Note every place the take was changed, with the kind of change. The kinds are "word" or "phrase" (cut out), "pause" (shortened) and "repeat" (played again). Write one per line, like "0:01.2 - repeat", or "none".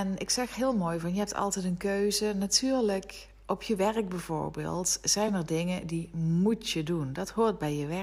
none

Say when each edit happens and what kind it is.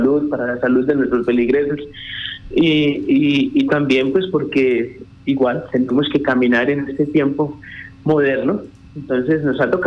none

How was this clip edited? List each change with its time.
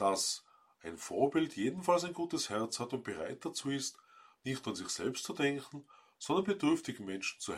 none

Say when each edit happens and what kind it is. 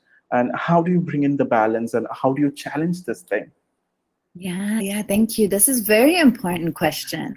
0:04.8 - word

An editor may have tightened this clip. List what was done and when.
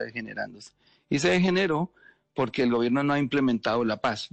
none

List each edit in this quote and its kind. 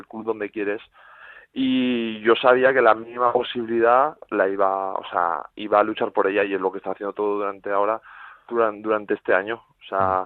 none

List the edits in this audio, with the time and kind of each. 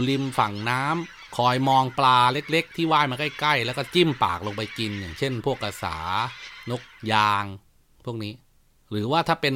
none

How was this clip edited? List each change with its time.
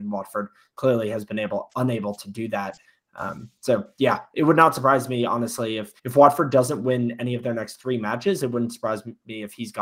0:06.0 - pause

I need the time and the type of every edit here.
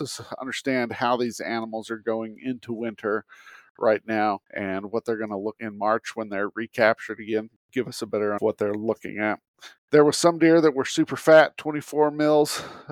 0:04.4 - pause
0:05.6 - word
0:08.4 - phrase
0:09.8 - pause

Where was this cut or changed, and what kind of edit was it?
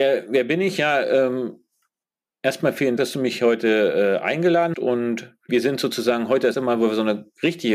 0:03.0 - word
0:04.7 - word
0:05.5 - word
0:06.5 - word

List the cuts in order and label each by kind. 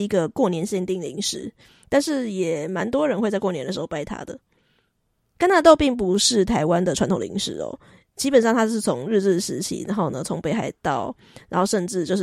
none

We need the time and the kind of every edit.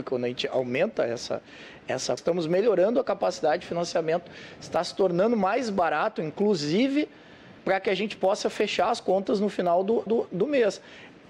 0:02.2 - phrase
0:07.6 - pause
0:10.1 - repeat

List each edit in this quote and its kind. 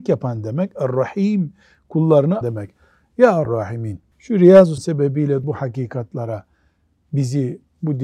0:02.4 - word
0:03.4 - word
0:04.1 - pause
0:04.8 - word
0:05.4 - word

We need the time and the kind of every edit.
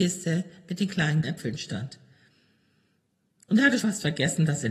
0:01.2 - word
0:03.8 - word

